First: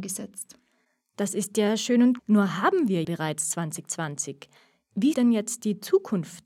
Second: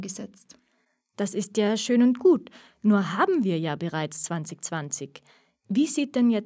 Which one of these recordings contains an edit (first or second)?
first